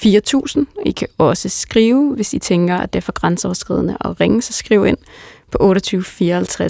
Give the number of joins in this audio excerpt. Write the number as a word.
zero